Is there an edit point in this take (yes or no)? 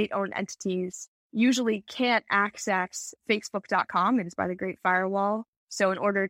yes